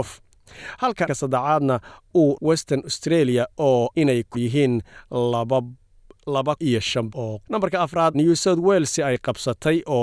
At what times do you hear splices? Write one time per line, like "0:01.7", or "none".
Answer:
0:01.1
0:02.4
0:03.9
0:04.3
0:06.6
0:07.1
0:07.5
0:08.1